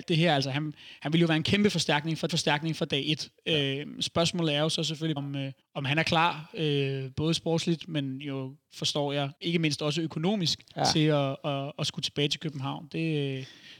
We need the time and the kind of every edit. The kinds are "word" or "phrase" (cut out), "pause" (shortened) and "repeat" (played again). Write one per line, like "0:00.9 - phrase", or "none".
0:02.3 - repeat
0:05.2 - word
0:05.6 - pause
0:09.4 - pause
0:10.7 - pause